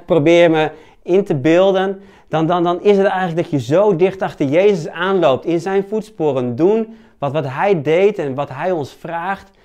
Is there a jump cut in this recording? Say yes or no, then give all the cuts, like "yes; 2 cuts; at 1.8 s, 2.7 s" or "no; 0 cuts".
no; 0 cuts